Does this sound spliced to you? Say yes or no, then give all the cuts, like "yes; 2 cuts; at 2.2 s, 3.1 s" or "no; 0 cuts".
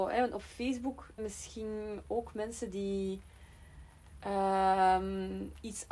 yes; 1 cut; at 1.2 s